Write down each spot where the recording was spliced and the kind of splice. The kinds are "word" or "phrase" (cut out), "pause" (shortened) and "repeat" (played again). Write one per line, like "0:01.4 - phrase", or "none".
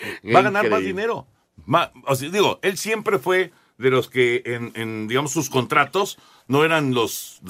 none